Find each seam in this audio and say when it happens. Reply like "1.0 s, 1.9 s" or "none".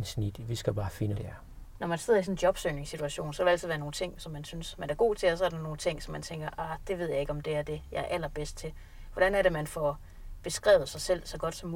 1.1 s